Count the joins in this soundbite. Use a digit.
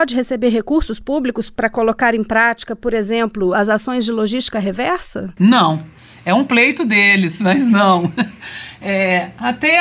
0